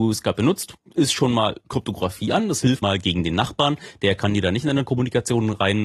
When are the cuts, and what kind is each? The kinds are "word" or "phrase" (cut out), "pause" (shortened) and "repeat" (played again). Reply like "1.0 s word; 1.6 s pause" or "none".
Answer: 2.8 s word